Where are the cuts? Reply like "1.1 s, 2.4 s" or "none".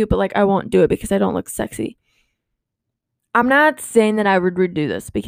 none